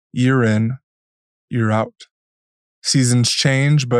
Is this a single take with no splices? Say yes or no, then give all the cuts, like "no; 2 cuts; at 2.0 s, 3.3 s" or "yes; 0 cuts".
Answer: yes; 0 cuts